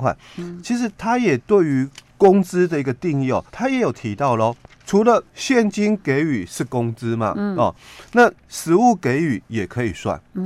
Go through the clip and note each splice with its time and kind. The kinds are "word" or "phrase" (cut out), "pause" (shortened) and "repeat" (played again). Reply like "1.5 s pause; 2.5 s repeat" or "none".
2.1 s pause; 3.5 s pause; 4.6 s pause; 5.3 s pause